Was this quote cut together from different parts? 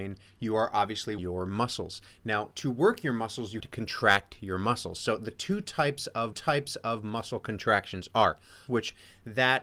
yes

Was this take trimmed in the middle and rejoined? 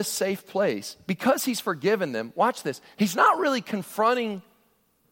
no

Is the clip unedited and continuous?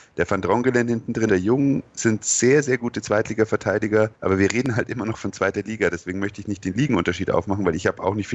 no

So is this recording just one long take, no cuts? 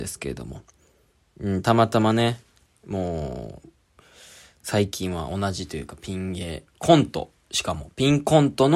yes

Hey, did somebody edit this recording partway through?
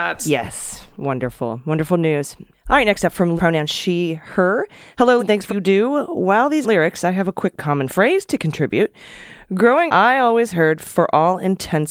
yes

